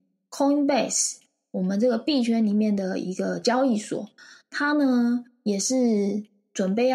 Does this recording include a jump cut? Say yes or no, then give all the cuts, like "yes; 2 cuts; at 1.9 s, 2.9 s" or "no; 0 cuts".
no; 0 cuts